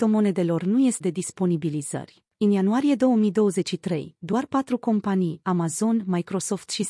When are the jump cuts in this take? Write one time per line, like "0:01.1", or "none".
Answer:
0:01.0
0:02.3
0:05.4